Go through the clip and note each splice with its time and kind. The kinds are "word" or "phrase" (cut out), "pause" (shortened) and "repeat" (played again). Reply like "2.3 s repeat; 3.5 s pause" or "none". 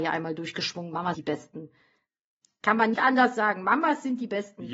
1.1 s word; 2.9 s word